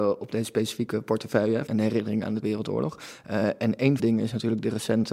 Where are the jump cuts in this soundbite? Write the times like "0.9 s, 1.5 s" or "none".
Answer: 1.7 s, 2.4 s, 4.0 s